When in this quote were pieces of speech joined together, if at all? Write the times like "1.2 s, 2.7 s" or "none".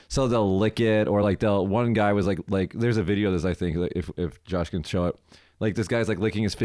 none